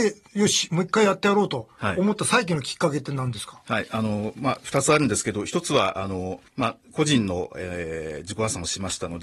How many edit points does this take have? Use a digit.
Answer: 1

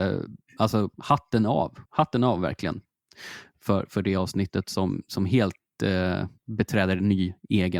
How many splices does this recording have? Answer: 3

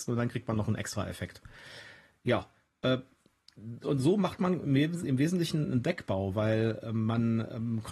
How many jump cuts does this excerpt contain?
1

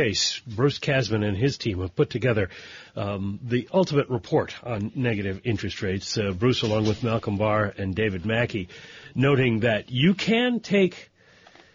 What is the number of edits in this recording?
0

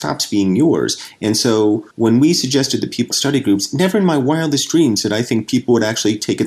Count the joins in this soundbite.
2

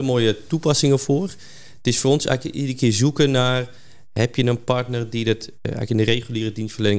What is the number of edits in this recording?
0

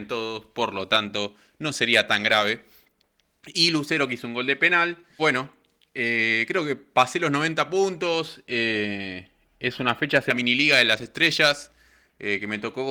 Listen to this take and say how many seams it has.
1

